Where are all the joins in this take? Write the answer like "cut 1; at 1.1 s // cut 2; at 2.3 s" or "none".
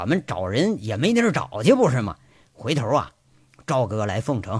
none